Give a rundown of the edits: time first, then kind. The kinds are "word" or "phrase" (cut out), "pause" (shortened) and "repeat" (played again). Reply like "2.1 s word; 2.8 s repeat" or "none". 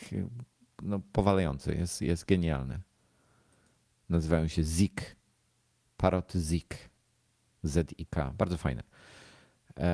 none